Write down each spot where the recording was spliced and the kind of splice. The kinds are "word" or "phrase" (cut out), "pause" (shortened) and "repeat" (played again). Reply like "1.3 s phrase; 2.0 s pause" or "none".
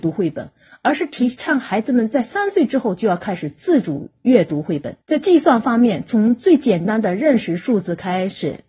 5.0 s pause

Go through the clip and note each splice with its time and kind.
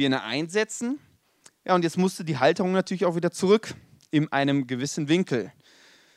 none

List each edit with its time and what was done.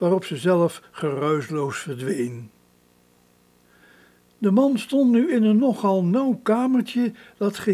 none

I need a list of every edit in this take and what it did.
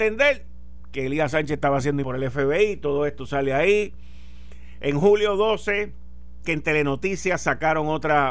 2.0 s word; 6.4 s word

